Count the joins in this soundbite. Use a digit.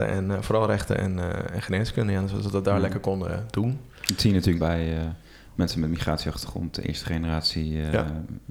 1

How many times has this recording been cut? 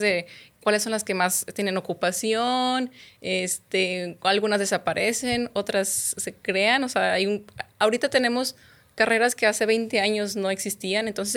1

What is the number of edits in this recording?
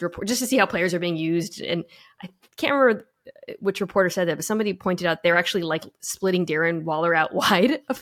0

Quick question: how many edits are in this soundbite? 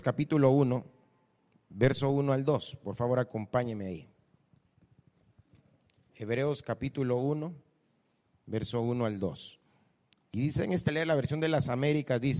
1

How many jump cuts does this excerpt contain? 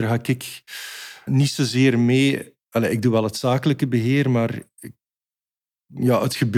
1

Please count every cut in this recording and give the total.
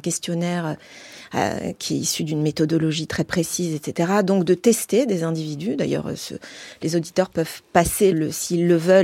1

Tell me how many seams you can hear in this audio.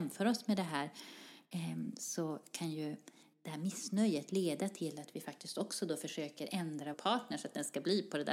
1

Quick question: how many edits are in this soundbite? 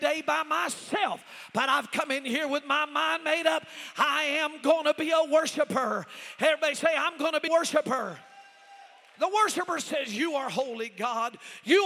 1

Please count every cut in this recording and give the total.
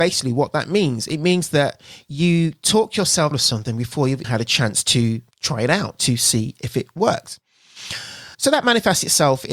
4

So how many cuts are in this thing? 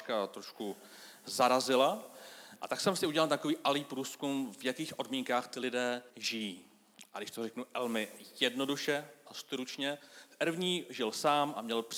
1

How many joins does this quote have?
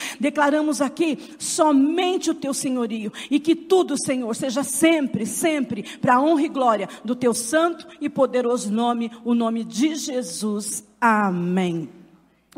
0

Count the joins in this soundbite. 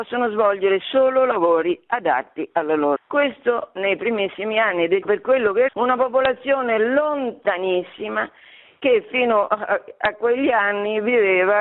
3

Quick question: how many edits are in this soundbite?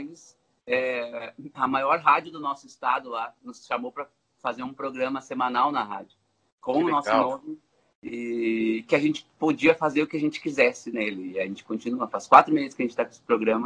0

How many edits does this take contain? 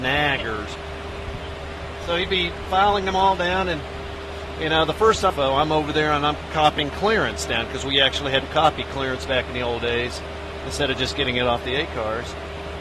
0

